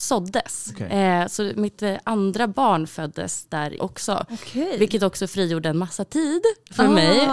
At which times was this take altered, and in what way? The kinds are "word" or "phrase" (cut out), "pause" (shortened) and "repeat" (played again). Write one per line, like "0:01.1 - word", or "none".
0:03.8 - word